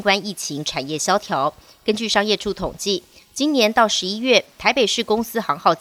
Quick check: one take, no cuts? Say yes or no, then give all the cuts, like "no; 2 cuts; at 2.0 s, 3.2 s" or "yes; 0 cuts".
yes; 0 cuts